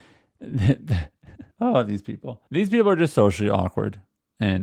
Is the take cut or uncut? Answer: cut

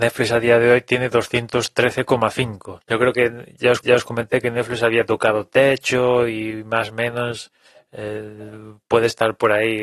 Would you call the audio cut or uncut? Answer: cut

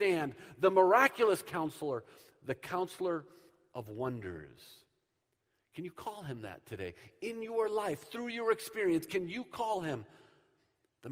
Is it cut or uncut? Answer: uncut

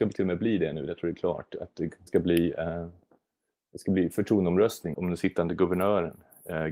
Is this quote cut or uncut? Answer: cut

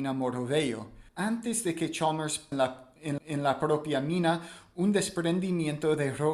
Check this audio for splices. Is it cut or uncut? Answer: cut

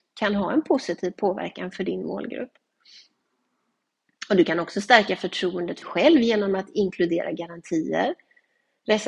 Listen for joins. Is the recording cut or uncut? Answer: cut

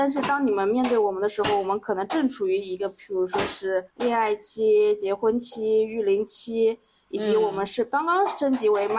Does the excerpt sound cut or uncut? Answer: cut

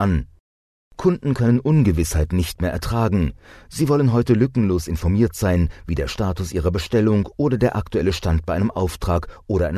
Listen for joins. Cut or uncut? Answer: uncut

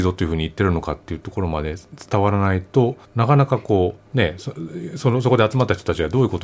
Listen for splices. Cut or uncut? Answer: cut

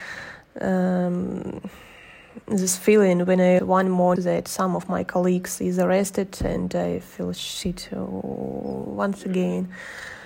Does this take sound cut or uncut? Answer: cut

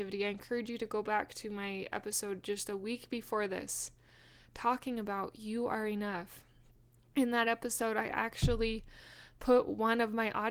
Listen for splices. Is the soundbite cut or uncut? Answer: uncut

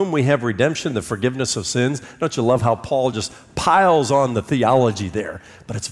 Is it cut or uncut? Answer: uncut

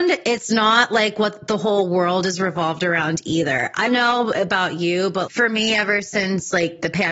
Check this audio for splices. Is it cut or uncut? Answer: cut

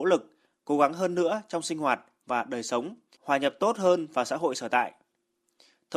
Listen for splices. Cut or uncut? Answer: uncut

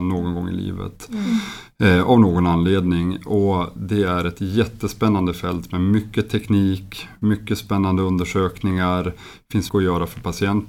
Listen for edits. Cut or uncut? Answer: cut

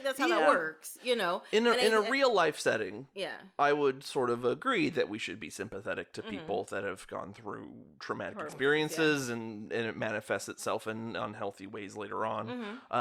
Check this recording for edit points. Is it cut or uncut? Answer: uncut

